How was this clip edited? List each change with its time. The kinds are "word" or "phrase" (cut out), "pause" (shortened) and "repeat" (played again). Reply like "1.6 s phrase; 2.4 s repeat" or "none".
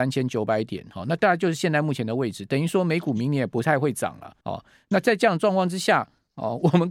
4.4 s pause